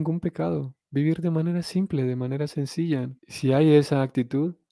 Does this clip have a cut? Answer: yes; 1 cut; at 3.2 s

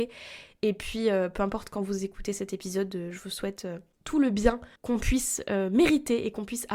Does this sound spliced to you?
yes; 1 cut; at 4.8 s

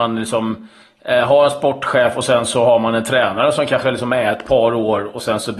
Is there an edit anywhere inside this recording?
no; 0 cuts

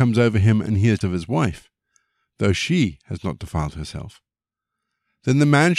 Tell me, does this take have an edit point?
yes; 1 cut; at 1.0 s

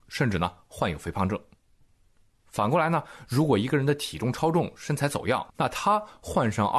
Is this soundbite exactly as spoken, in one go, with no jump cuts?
no; 1 cut; at 5.5 s

